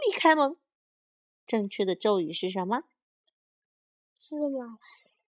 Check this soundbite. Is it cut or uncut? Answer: uncut